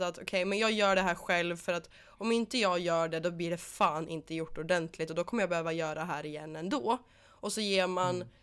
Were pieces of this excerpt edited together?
no; 0 cuts

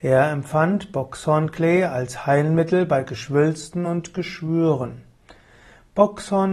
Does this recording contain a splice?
no; 0 cuts

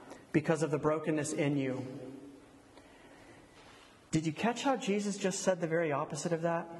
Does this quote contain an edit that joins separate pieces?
no; 0 cuts

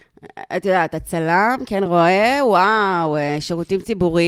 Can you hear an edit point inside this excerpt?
no; 0 cuts

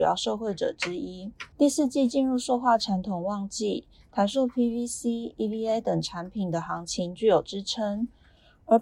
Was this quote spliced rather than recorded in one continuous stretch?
yes; 1 cut; at 1.5 s

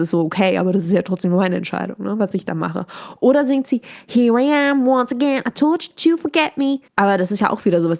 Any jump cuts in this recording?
yes; 1 cut; at 6.9 s

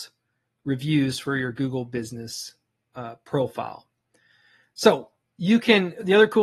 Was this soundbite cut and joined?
no; 0 cuts

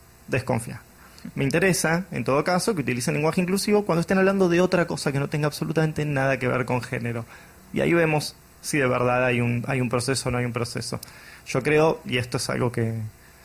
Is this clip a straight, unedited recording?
yes; 0 cuts

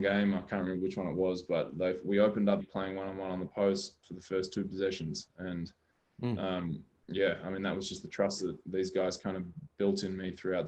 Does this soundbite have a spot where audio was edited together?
yes; 1 cut; at 2.6 s

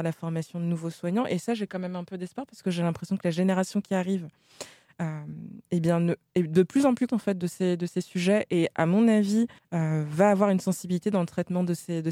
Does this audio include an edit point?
yes; 3 cuts; at 5.6 s, 7.1 s, 9.6 s

